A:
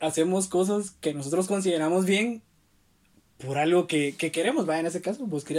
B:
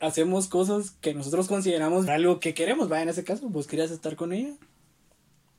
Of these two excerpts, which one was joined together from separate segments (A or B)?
B